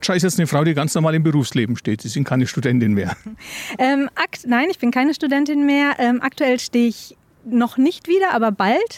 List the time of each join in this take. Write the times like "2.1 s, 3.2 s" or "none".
none